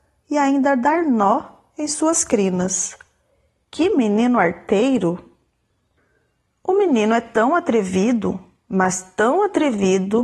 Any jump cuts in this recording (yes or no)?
no